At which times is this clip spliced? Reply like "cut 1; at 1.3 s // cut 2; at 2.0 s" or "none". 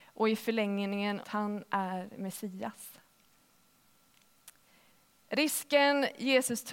cut 1; at 1.2 s